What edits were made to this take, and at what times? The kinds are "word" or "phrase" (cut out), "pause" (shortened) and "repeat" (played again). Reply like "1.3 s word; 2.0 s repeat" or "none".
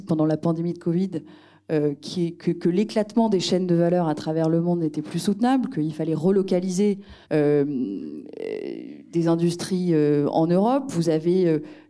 7.2 s pause

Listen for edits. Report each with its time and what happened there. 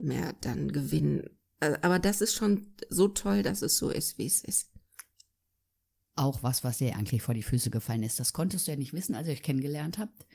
none

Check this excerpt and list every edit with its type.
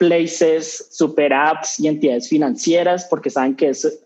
none

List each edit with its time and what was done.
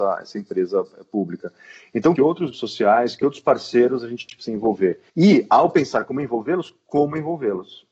2.1 s phrase; 2.5 s word; 5.1 s pause

